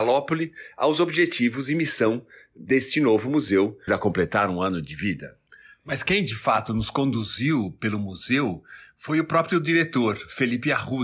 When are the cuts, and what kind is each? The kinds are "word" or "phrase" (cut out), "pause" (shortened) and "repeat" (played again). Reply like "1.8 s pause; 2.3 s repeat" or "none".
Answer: 3.9 s word